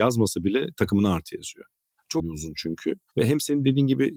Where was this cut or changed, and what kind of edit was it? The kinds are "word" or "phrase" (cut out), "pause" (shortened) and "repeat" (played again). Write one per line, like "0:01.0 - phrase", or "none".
0:02.2 - word